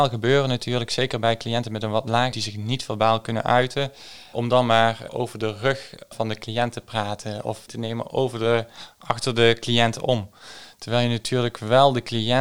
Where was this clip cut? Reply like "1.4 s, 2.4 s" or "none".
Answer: 2.3 s, 4.3 s, 5.1 s, 6.1 s, 7.7 s